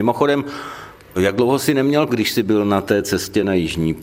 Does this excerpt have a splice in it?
yes; 1 cut; at 2.1 s

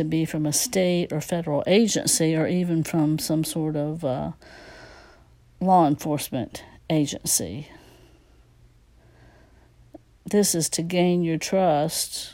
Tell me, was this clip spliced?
no; 0 cuts

